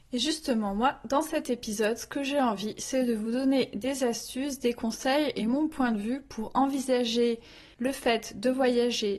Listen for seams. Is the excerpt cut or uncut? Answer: uncut